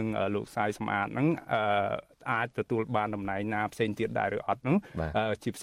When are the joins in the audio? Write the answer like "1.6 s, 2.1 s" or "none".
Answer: none